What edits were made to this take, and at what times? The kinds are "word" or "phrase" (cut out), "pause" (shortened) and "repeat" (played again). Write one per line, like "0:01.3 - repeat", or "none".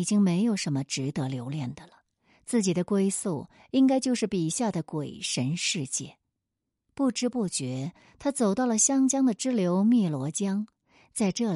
none